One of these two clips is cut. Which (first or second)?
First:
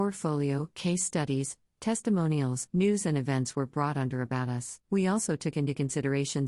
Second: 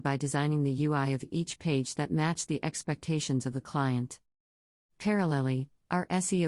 first